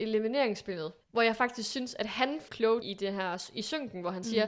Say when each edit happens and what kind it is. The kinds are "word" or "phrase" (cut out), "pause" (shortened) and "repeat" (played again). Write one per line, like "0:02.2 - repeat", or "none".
0:01.0 - pause
0:02.5 - phrase
0:02.8 - word